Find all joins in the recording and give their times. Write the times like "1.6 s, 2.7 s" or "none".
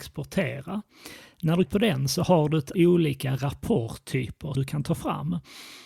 1.7 s, 2.7 s, 4.5 s

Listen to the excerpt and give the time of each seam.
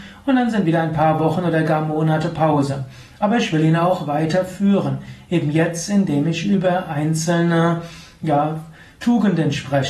none

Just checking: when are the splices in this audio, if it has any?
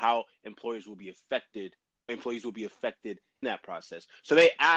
2.1 s, 3.4 s

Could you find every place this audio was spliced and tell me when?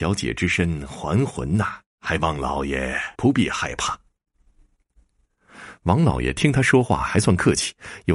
1.9 s, 3.1 s

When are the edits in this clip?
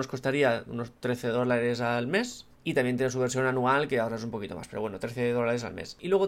1.0 s, 2.5 s

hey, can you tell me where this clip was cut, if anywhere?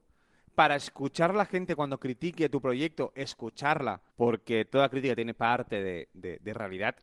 4.1 s

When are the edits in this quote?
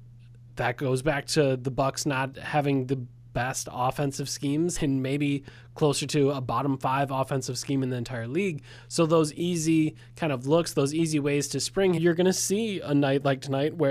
4.8 s, 12.0 s

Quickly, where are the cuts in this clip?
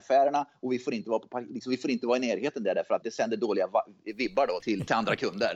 3.0 s, 4.6 s

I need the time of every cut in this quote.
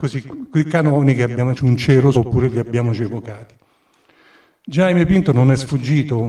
1.5 s, 2.1 s

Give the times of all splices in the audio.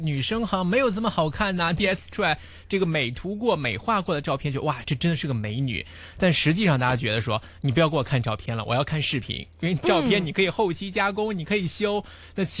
1.8 s

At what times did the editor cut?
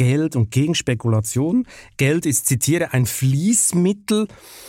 none

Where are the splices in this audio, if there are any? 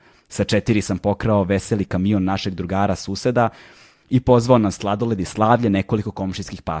none

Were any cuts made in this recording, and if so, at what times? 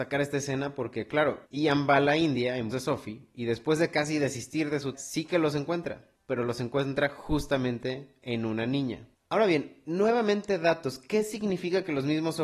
1.4 s, 2.7 s, 4.9 s, 6.2 s

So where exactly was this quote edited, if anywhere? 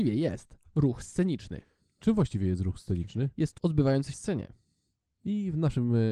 3.6 s, 4.1 s

